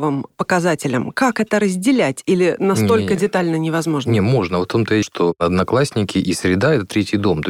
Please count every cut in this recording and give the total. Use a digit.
1